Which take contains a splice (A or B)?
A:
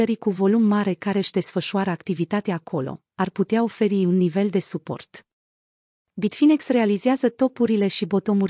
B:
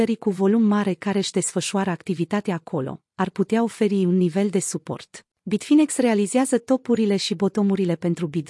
B